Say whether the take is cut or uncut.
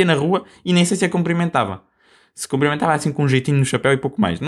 uncut